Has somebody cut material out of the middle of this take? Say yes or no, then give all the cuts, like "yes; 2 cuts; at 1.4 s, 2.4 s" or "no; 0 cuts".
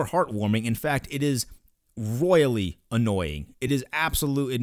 no; 0 cuts